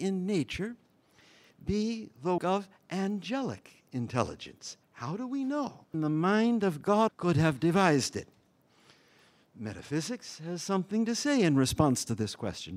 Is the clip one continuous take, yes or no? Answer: no